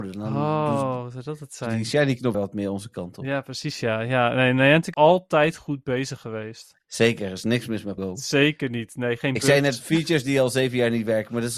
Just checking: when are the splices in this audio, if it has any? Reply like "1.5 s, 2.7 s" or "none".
2.3 s, 4.9 s, 6.8 s, 8.0 s